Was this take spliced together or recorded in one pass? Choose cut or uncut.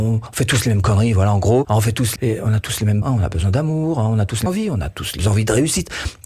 cut